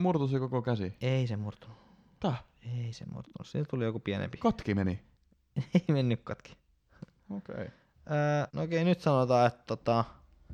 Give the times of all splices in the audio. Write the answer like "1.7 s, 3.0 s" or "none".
8.5 s